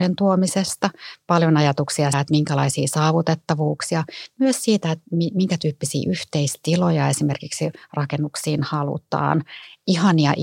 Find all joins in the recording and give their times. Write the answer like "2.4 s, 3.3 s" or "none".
2.1 s